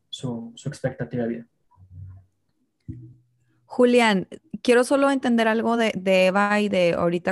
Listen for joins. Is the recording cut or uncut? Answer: uncut